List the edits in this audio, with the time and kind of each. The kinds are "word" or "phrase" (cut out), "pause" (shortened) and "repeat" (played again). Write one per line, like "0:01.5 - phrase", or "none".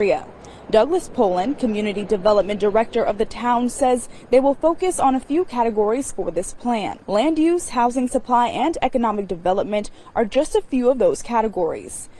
0:07.0 - pause